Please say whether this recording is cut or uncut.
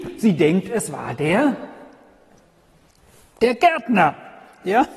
uncut